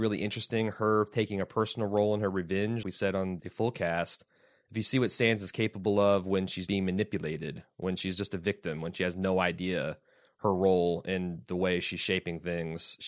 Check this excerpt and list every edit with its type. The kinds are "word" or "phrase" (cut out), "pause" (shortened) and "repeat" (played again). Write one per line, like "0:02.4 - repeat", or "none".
0:02.8 - word
0:03.4 - word
0:06.7 - word